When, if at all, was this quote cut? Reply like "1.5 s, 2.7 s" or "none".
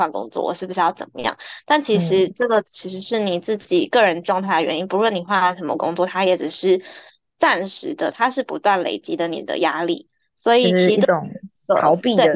none